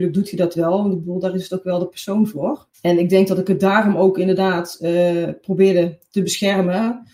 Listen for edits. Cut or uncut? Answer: cut